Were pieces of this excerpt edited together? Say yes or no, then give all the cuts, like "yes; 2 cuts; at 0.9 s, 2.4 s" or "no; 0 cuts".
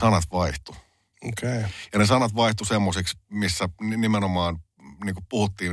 no; 0 cuts